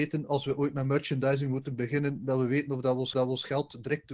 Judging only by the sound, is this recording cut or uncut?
cut